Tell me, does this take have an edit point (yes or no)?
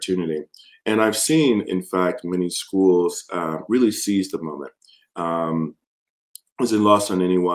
no